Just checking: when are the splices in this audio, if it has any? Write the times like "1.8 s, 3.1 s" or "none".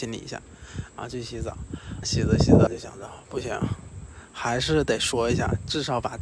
2.0 s, 2.7 s